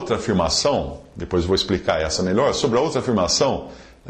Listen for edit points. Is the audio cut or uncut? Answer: uncut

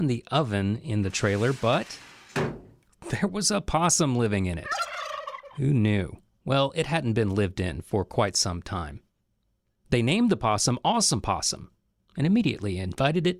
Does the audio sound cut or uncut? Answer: uncut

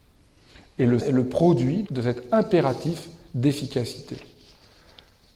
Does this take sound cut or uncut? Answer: cut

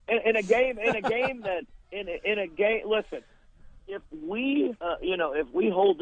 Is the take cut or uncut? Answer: cut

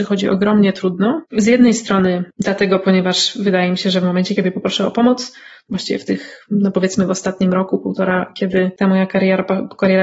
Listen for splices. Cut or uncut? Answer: cut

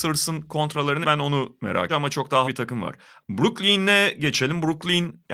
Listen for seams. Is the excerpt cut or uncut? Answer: cut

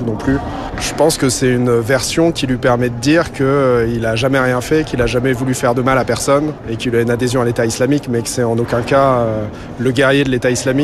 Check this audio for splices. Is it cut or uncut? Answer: uncut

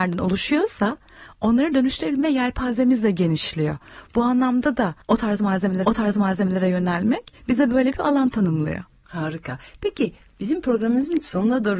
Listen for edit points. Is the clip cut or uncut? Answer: cut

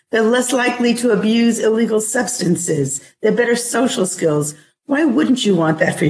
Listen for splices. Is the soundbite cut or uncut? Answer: uncut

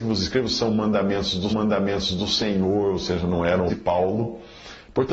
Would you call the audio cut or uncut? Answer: cut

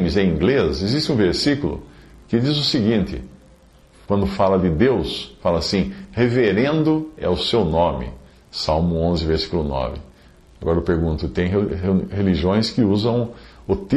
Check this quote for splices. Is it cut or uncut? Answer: uncut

